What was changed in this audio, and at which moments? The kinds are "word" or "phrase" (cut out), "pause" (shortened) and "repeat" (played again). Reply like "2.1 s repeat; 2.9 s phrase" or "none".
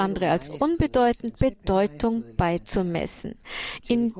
1.4 s word